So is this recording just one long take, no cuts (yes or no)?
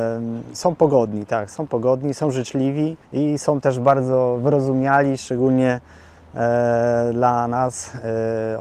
no